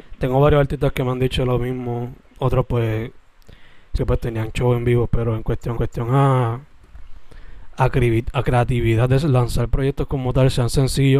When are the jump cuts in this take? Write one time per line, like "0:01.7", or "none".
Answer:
0:04.0
0:05.8